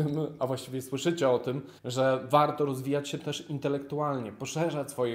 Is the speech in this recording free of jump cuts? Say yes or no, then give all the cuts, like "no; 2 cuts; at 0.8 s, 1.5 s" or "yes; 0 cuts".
no; 1 cut; at 1.8 s